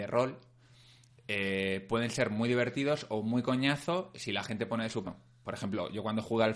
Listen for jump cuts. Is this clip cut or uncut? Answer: cut